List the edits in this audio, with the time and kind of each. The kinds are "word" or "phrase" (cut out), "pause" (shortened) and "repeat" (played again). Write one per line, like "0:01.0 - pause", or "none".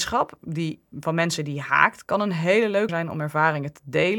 0:02.9 - word